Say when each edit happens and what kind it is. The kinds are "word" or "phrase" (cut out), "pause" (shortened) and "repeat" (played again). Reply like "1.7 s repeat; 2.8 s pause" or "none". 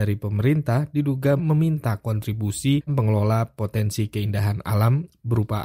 1.4 s phrase; 2.9 s word